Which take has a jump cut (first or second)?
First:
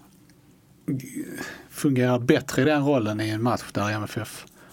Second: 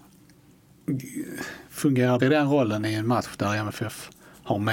second